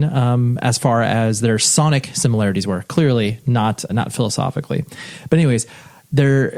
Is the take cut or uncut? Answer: cut